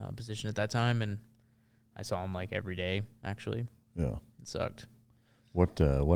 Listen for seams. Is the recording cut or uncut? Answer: uncut